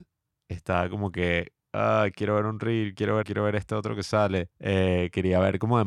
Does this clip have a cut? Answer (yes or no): yes